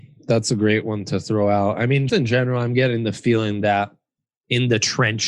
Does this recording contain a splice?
yes; 1 cut; at 2.1 s

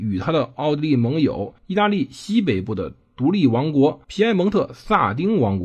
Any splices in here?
yes; 2 cuts; at 1.6 s, 4.0 s

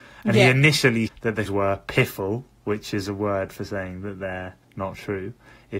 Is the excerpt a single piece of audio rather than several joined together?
no; 3 cuts; at 1.1 s, 1.5 s, 4.6 s

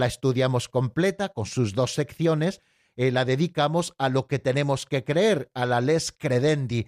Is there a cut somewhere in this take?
no; 0 cuts

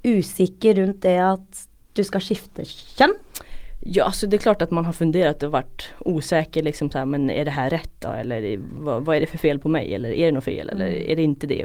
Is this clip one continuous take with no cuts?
yes; 0 cuts

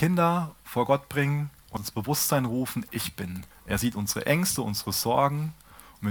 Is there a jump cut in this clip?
yes; 3 cuts; at 1.8 s, 2.9 s, 3.5 s

